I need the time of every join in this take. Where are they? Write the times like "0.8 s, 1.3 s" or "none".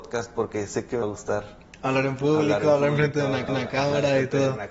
1.0 s, 3.5 s